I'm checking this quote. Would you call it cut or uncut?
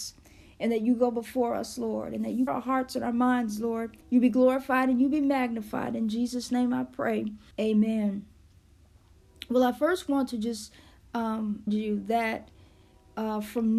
cut